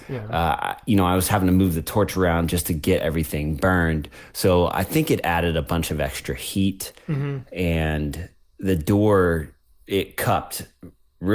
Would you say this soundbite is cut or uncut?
uncut